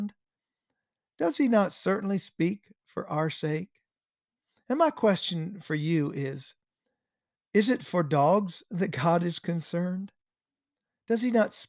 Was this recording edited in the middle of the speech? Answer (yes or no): no